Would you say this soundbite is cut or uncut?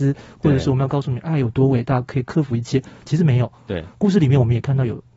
uncut